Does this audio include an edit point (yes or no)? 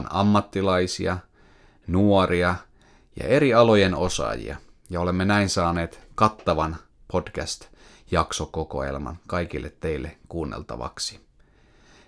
no